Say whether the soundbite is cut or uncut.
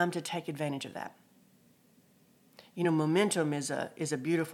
uncut